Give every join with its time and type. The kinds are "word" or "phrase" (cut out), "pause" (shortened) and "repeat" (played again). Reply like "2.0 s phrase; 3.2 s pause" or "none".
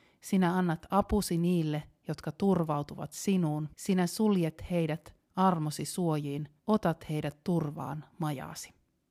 3.7 s pause; 6.6 s pause